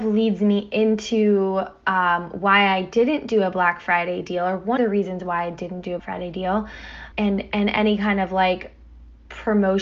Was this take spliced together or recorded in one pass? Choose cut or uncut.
cut